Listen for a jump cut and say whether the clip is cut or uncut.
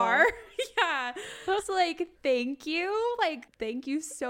cut